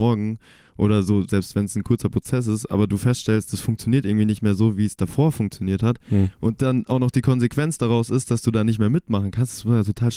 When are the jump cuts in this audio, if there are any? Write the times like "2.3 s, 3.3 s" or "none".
none